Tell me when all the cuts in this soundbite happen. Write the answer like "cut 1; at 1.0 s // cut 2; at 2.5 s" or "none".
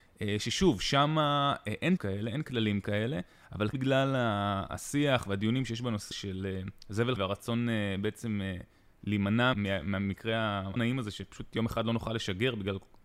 cut 1; at 2.0 s // cut 2; at 3.7 s // cut 3; at 6.1 s // cut 4; at 7.2 s // cut 5; at 9.5 s // cut 6; at 10.8 s